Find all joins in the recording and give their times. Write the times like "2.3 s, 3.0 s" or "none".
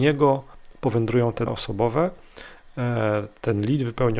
1.5 s